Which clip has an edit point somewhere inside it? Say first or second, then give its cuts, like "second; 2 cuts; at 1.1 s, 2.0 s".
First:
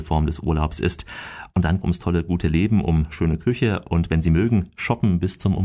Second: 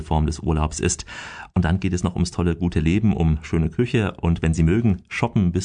first; 1 cut; at 1.8 s